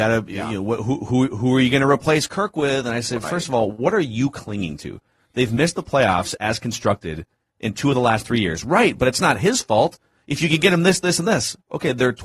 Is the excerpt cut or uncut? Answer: uncut